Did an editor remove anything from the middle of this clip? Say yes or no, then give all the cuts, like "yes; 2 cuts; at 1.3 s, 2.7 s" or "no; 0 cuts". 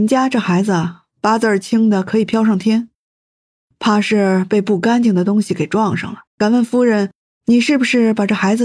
yes; 1 cut; at 6.3 s